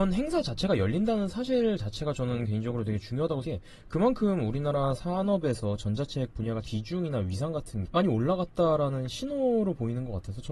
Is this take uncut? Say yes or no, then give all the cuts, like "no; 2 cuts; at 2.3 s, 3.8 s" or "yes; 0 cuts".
no; 3 cuts; at 3.4 s, 6.6 s, 7.8 s